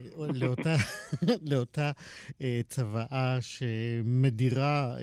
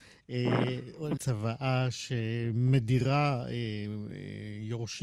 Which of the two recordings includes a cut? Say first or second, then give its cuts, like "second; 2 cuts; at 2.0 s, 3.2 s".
second; 1 cut; at 1.2 s